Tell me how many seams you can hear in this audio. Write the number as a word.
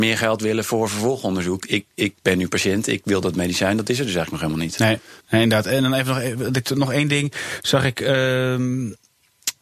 one